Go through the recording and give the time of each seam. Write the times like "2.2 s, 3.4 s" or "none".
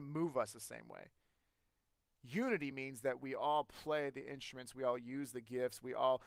none